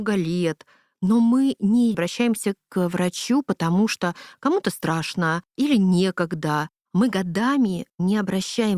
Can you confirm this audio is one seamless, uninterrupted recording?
no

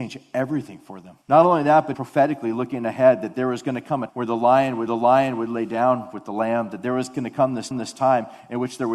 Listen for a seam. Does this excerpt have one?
yes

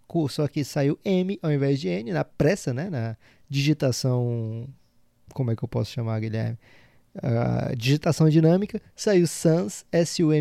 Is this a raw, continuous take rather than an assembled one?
yes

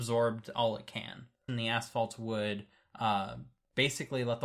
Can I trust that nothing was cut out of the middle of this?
no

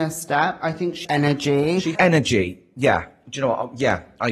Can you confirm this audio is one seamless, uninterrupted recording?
no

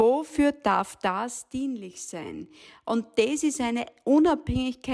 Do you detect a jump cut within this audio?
no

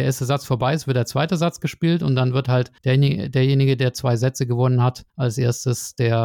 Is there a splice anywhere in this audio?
yes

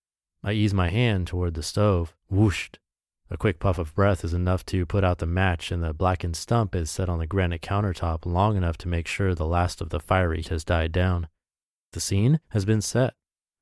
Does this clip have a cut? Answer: yes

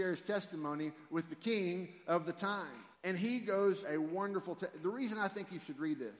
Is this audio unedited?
no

